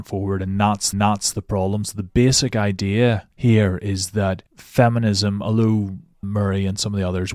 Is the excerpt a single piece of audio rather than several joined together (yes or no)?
no